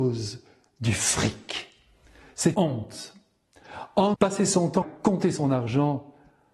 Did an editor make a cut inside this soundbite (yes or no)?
yes